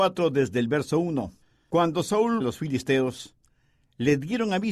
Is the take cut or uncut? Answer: cut